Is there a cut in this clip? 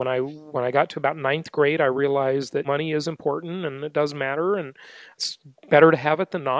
no; 0 cuts

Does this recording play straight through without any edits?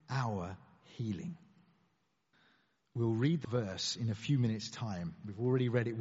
no; 2 cuts; at 2.3 s, 3.4 s

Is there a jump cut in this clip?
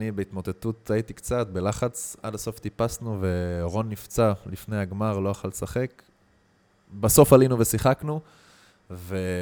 no; 0 cuts

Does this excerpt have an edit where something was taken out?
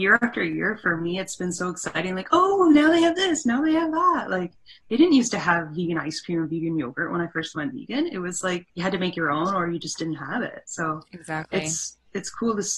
yes; 1 cut; at 8.7 s

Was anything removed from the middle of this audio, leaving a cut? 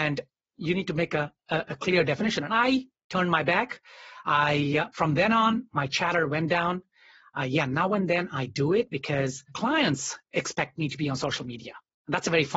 yes; 2 cuts; at 1.4 s, 9.5 s

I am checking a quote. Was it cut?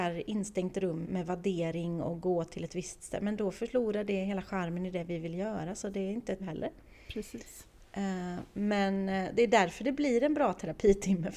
yes; 2 cuts; at 1.0 s, 6.4 s

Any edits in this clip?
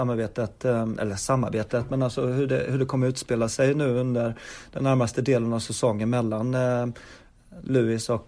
no; 0 cuts

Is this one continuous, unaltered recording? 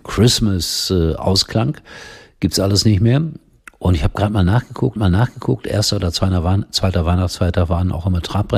no; 1 cut; at 5.0 s

